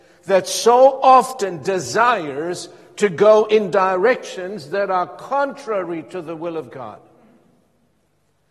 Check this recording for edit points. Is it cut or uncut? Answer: uncut